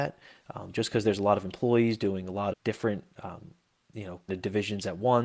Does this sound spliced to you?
yes; 2 cuts; at 2.5 s, 4.3 s

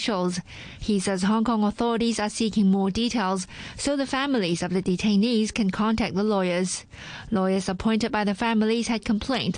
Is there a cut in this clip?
no; 0 cuts

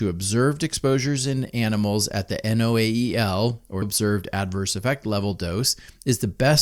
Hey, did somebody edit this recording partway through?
yes; 1 cut; at 3.8 s

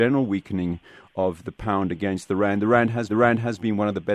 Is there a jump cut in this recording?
yes; 1 cut; at 3.1 s

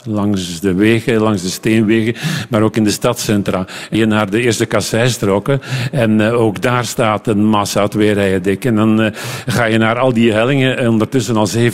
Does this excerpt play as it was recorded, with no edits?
no; 1 cut; at 3.9 s

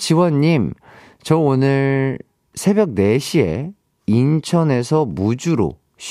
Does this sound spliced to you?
no; 0 cuts

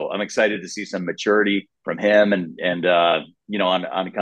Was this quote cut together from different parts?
yes; 1 cut; at 1.7 s

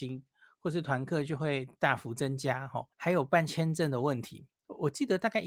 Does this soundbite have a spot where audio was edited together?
yes; 2 cuts; at 2.9 s, 4.5 s

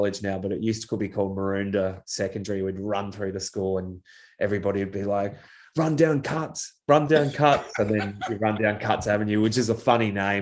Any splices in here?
no; 0 cuts

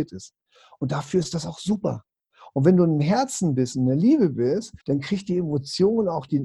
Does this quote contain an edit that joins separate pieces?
yes; 1 cut; at 4.8 s

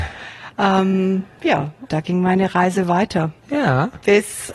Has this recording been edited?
yes; 2 cuts; at 1.9 s, 3.4 s

